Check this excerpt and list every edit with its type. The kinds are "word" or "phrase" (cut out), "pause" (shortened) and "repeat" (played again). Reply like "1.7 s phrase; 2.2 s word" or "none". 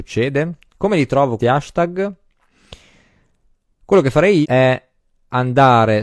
1.4 s word; 4.4 s word